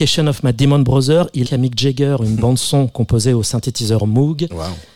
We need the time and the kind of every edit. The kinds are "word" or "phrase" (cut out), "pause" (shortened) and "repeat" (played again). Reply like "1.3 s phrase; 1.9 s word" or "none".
1.5 s word